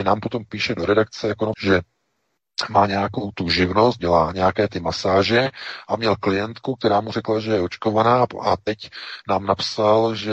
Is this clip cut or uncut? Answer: cut